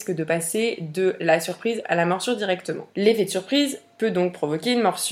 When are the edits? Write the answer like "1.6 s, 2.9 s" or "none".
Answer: 2.9 s